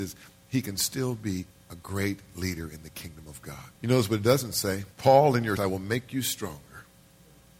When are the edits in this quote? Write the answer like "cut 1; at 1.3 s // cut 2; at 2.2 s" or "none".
cut 1; at 1.5 s // cut 2; at 3.7 s // cut 3; at 4.9 s // cut 4; at 5.6 s